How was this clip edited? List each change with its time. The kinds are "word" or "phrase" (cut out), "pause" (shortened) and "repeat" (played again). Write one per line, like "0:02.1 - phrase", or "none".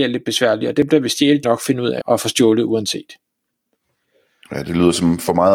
0:01.4 - word
0:02.0 - word